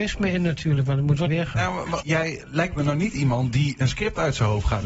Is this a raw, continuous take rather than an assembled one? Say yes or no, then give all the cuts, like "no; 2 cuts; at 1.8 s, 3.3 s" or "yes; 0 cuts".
no; 2 cuts; at 1.3 s, 2.0 s